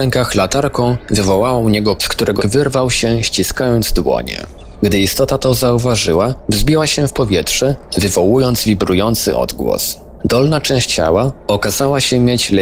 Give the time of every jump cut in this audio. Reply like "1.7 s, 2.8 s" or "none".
2.0 s, 2.4 s, 10.9 s